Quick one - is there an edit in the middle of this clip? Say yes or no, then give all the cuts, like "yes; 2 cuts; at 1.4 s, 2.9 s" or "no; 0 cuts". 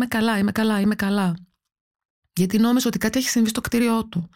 no; 0 cuts